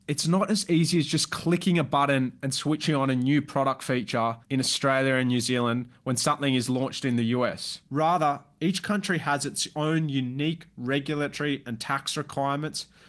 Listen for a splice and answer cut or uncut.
cut